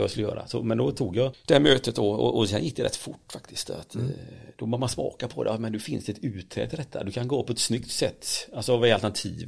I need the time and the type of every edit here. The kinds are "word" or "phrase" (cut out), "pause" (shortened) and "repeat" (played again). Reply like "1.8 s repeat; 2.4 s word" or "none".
none